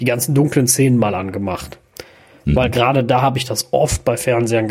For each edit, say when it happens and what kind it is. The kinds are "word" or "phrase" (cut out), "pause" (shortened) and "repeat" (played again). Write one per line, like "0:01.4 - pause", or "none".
none